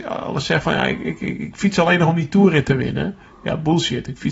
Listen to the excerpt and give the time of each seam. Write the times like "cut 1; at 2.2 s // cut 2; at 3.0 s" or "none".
none